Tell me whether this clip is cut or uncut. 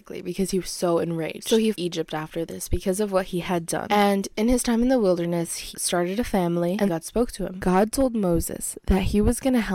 cut